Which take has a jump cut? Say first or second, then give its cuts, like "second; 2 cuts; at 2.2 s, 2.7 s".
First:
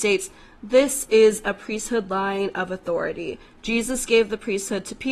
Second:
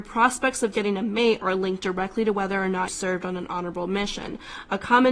second; 1 cut; at 2.9 s